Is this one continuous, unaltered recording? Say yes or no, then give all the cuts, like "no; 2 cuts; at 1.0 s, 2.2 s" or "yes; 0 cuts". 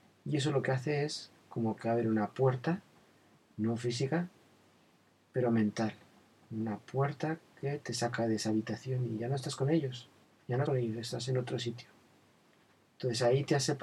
no; 2 cuts; at 10.2 s, 10.7 s